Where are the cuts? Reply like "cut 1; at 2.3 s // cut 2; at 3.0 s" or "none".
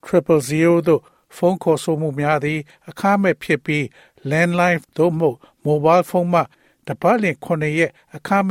cut 1; at 4.8 s